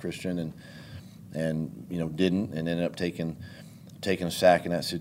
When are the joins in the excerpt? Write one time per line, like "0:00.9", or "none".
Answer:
none